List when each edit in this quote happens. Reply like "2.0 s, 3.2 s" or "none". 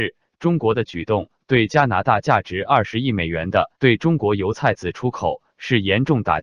3.7 s